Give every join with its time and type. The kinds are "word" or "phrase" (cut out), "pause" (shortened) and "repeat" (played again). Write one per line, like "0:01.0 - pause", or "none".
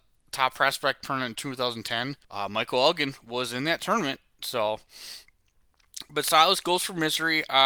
0:02.2 - pause